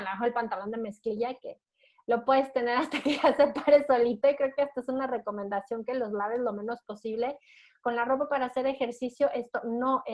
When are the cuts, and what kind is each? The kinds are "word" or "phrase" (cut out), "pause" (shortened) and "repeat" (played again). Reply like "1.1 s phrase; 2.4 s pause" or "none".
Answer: none